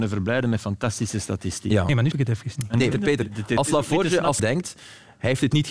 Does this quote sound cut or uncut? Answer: cut